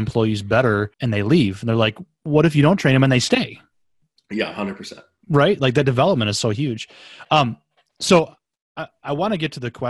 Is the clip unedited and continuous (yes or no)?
no